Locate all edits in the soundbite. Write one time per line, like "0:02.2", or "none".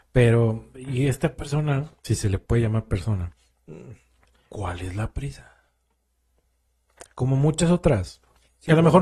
0:02.0
0:04.2